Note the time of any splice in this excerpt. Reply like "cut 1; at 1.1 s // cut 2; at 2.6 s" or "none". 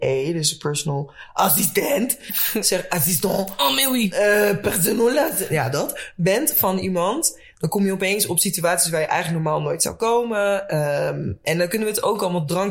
none